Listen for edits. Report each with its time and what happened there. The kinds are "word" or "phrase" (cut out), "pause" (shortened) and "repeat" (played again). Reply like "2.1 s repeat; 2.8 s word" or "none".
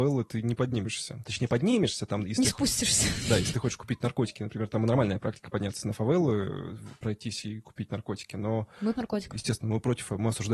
8.9 s word